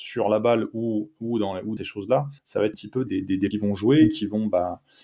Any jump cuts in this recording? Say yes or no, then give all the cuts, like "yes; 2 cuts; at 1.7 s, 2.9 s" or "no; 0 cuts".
yes; 5 cuts; at 1.8 s, 2.4 s, 2.7 s, 3.1 s, 3.5 s